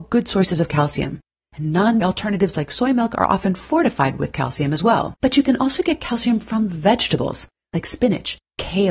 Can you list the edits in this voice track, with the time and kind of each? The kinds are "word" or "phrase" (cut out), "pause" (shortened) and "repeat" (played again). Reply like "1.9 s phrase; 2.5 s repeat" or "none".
2.0 s word; 5.2 s pause